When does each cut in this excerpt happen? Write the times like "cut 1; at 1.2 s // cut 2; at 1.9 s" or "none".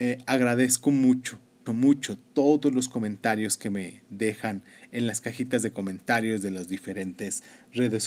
cut 1; at 1.7 s